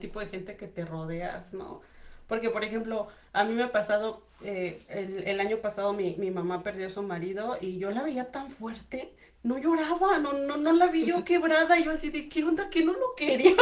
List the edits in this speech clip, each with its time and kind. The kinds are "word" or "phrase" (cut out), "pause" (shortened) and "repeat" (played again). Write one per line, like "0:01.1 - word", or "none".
0:09.3 - pause